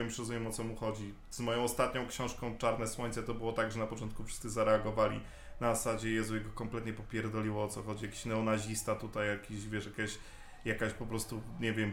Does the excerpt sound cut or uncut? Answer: uncut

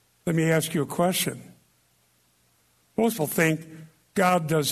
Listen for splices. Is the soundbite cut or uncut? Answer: cut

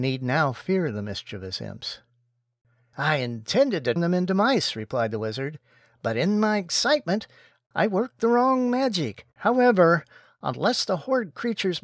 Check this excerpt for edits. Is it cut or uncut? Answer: cut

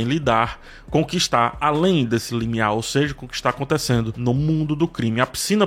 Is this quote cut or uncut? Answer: uncut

